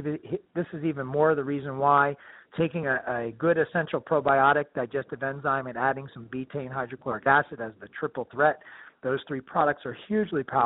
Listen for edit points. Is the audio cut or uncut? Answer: uncut